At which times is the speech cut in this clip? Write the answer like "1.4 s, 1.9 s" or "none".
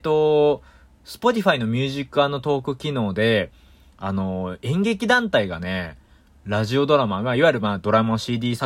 none

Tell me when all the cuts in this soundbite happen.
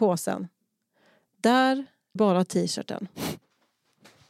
2.2 s

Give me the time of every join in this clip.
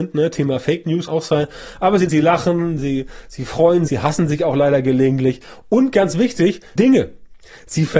1.1 s, 2.1 s, 2.8 s, 3.9 s, 6.8 s

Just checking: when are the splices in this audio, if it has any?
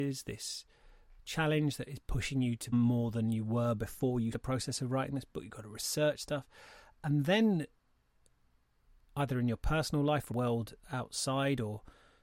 2.7 s, 4.3 s, 10.3 s

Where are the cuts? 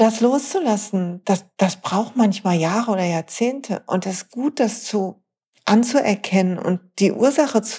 none

